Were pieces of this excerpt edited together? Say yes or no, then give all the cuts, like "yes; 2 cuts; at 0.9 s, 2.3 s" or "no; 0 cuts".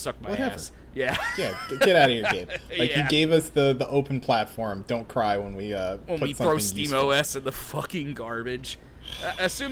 no; 0 cuts